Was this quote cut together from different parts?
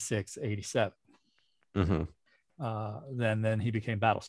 no; 0 cuts

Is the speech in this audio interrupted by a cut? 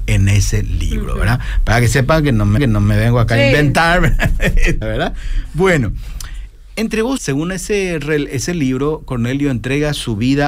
yes; 3 cuts; at 2.6 s, 4.8 s, 7.2 s

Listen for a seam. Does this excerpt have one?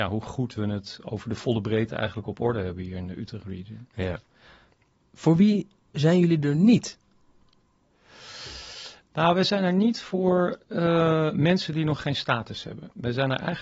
no; 0 cuts

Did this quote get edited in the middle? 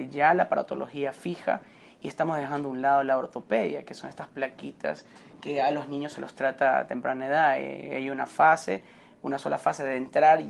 no; 0 cuts

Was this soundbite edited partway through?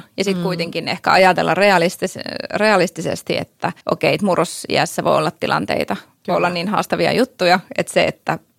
yes; 1 cut; at 3.8 s

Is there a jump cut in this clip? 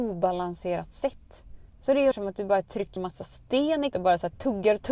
yes; 4 cuts; at 1.7 s, 2.1 s, 3.0 s, 3.9 s

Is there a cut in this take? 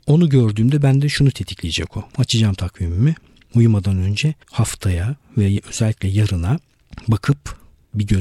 yes; 2 cuts; at 2.1 s, 4.4 s

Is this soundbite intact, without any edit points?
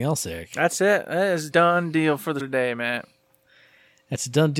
no; 2 cuts; at 1.5 s, 2.4 s

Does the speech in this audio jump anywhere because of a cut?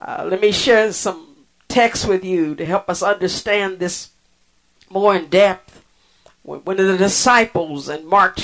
no; 0 cuts

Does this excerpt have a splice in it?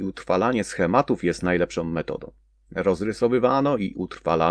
no; 0 cuts

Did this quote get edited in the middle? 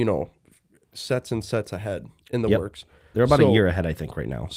no; 0 cuts

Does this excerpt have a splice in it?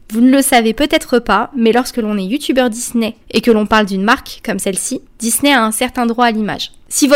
yes; 2 cuts; at 3.2 s, 5.1 s

